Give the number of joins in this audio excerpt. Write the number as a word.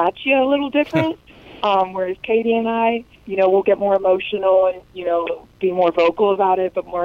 one